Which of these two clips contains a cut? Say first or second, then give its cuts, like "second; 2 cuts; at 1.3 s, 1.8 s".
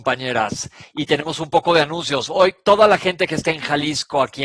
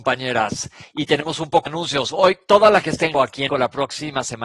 second; 4 cuts; at 1.7 s, 2.8 s, 3.1 s, 3.5 s